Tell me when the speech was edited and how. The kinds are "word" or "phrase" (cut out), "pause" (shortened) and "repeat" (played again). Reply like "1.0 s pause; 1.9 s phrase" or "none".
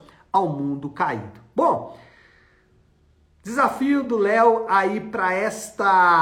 none

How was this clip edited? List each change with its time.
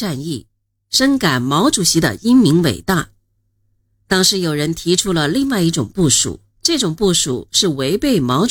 6.5 s pause

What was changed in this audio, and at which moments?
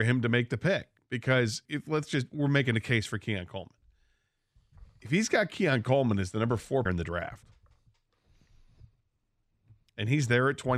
1.7 s word; 6.9 s word

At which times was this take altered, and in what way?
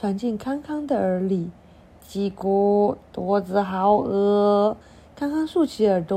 4.8 s pause

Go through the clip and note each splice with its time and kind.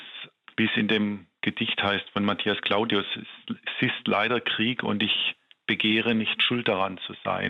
none

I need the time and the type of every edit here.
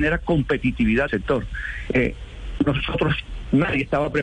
1.1 s phrase; 2.6 s word

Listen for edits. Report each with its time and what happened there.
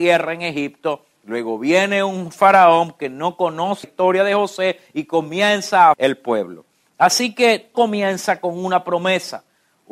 3.8 s word; 5.9 s word; 7.7 s word

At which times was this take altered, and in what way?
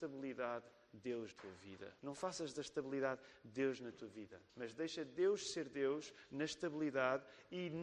1.3 s word; 2.0 s pause; 4.5 s pause

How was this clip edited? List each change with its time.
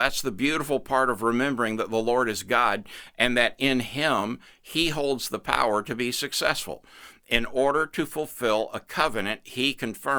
none

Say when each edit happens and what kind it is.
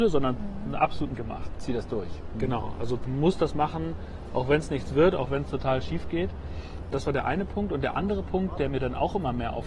1.2 s word

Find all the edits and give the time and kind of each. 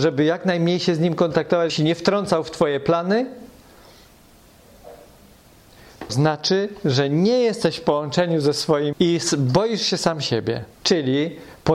1.7 s word; 6.1 s word; 8.9 s word; 10.7 s pause

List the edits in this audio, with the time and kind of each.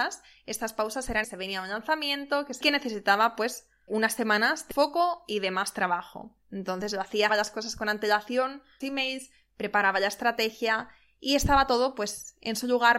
1.2 s phrase; 2.6 s phrase; 3.9 s word; 4.7 s word; 6.4 s pause; 7.3 s phrase; 8.8 s phrase

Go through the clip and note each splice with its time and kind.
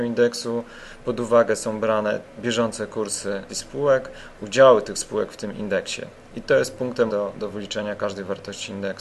2.4 s word; 3.5 s word; 4.4 s word; 7.1 s word

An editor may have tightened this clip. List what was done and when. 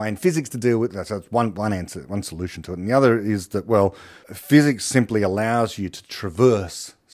4.2 s pause

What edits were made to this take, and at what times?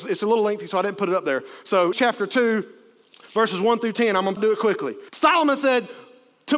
1.9 s word; 3.2 s pause; 4.4 s word; 5.1 s pause

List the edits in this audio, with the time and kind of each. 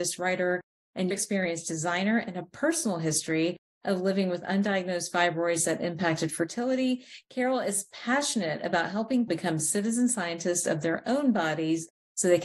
1.1 s word; 9.3 s word

